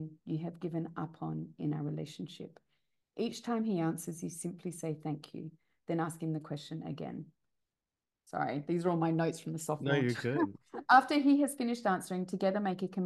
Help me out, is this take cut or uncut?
uncut